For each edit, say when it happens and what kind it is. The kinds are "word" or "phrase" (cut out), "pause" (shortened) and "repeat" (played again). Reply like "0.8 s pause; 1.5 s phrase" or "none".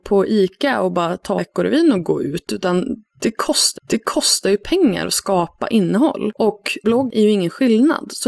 1.4 s word; 3.7 s repeat; 6.8 s word